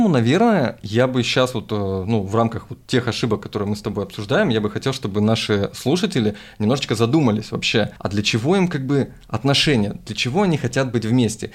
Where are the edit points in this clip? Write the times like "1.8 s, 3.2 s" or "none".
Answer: 8.0 s